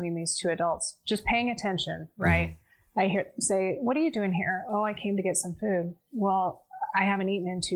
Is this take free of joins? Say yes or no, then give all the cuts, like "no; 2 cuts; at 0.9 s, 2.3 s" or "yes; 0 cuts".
yes; 0 cuts